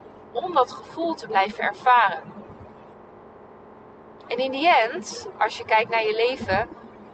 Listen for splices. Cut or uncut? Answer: uncut